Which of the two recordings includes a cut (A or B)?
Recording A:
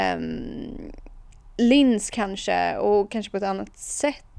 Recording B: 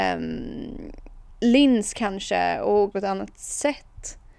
B